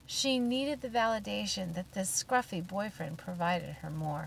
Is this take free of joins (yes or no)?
yes